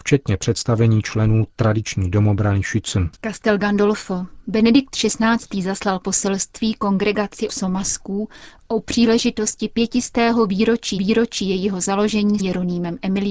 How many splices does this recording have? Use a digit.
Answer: 4